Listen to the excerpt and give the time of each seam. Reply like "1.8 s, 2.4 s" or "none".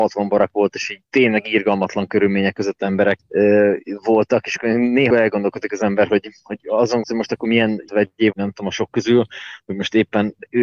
1.1 s, 3.2 s, 5.1 s, 6.4 s, 7.0 s, 7.9 s, 8.3 s